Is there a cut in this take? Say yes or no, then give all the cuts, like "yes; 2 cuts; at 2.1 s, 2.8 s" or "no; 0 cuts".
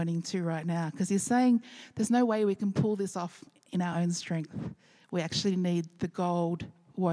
no; 0 cuts